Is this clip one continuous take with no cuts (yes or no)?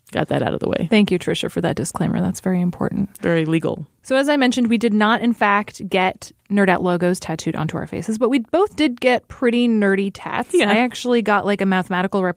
yes